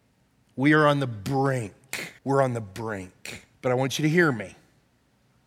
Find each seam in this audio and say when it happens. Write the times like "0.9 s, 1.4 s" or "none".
2.2 s, 3.5 s

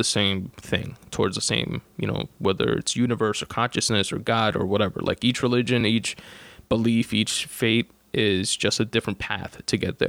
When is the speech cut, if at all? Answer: none

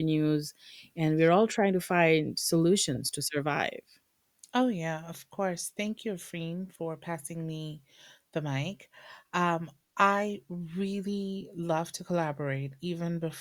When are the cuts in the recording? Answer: none

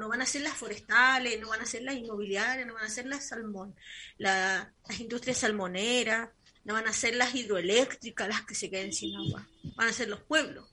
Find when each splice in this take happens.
none

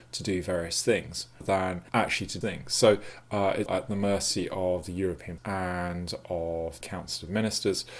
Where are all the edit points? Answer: 1.4 s, 1.9 s, 2.4 s, 3.7 s, 5.4 s, 6.8 s

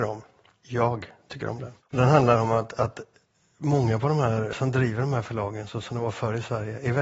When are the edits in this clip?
1.8 s, 4.5 s

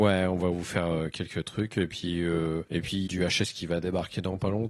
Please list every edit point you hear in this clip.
2.7 s, 3.1 s

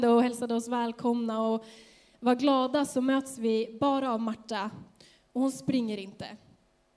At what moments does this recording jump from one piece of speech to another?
none

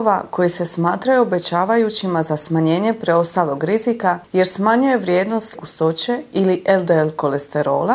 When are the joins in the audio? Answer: 5.5 s

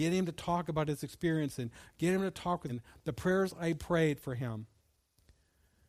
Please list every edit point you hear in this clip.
2.7 s

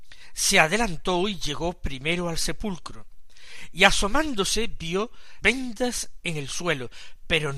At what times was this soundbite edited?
5.4 s

